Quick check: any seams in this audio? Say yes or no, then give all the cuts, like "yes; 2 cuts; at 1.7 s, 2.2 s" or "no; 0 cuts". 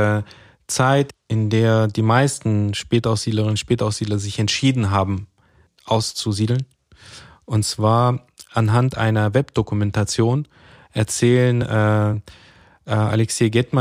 no; 0 cuts